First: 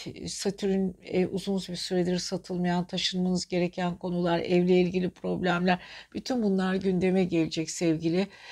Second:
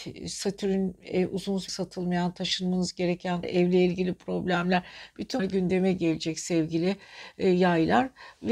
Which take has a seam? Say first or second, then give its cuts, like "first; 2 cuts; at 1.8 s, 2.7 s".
second; 3 cuts; at 1.7 s, 3.4 s, 5.4 s